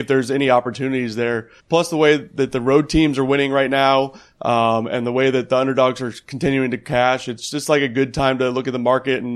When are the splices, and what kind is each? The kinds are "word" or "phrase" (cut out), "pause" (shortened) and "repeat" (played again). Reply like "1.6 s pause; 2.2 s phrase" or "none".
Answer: 1.6 s pause